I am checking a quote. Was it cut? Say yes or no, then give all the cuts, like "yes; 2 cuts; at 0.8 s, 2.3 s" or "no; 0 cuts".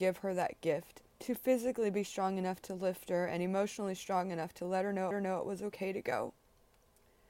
yes; 2 cuts; at 1.1 s, 5.1 s